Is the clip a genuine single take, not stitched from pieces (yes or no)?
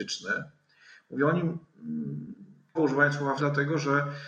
no